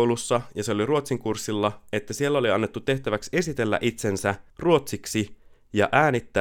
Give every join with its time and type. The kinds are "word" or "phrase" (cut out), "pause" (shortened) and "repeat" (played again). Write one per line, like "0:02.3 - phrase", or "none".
0:04.5 - pause